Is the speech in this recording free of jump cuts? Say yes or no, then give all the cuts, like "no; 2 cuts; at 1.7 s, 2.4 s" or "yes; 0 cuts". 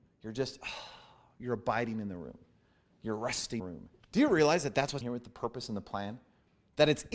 no; 3 cuts; at 3.6 s, 4.0 s, 5.0 s